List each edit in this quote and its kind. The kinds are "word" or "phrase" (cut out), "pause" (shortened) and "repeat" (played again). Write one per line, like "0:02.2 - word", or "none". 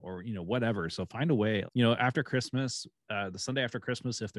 0:01.7 - word